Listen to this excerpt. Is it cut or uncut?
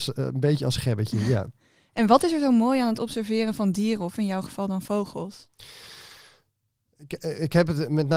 uncut